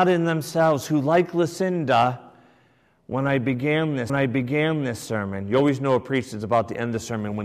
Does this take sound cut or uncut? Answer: cut